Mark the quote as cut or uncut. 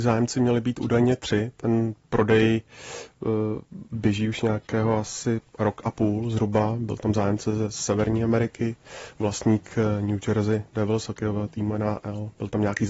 uncut